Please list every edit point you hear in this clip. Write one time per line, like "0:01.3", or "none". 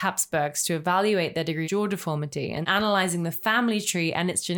0:01.6
0:02.6